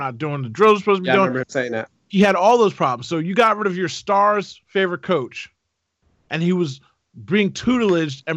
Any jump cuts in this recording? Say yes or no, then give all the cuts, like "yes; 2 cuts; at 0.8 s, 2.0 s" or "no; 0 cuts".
no; 0 cuts